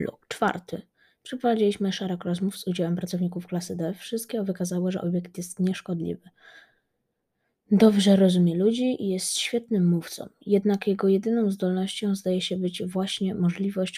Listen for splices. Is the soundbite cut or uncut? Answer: uncut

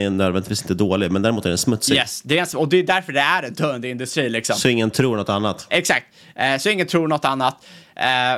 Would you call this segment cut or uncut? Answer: uncut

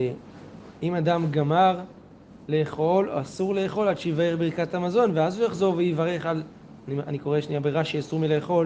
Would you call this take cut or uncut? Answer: uncut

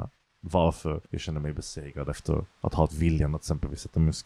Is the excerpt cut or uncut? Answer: cut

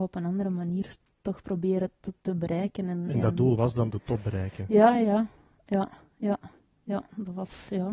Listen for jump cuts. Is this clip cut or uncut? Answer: uncut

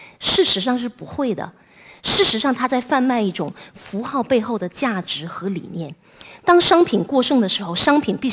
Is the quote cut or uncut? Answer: uncut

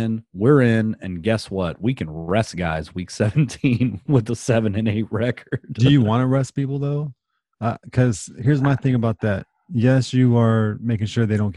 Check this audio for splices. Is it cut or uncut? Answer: uncut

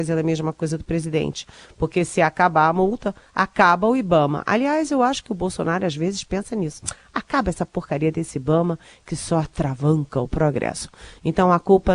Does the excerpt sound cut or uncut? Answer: uncut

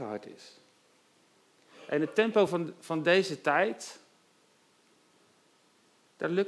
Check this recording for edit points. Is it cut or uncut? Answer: uncut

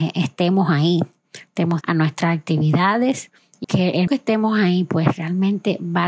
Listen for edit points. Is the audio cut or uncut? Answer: cut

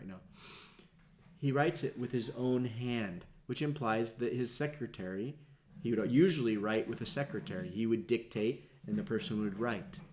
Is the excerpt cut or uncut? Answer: uncut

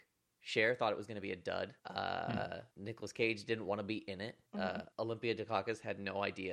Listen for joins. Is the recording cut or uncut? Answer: cut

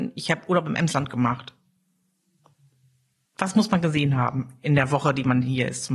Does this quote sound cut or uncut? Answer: uncut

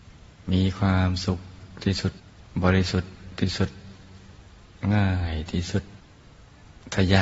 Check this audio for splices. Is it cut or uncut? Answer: uncut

